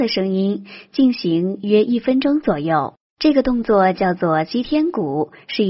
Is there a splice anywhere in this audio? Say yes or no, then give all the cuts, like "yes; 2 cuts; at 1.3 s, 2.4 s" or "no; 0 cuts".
yes; 1 cut; at 3.1 s